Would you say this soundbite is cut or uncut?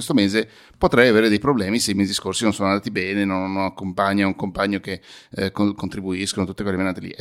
uncut